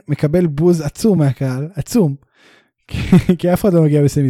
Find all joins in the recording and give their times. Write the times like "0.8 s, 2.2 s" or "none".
none